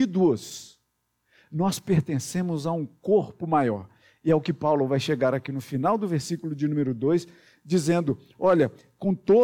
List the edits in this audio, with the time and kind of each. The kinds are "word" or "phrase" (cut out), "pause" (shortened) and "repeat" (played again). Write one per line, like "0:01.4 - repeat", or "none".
none